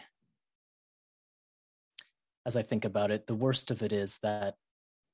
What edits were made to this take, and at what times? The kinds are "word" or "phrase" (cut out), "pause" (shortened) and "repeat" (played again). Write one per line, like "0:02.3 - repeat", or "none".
none